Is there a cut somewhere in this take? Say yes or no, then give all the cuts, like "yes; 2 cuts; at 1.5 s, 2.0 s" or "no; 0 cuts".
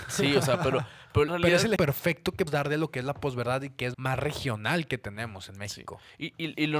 yes; 4 cuts; at 1.3 s, 1.8 s, 2.5 s, 3.9 s